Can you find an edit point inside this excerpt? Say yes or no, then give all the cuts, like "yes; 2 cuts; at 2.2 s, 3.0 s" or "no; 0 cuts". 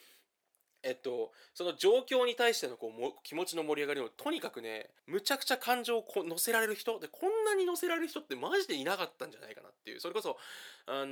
yes; 1 cut; at 5.0 s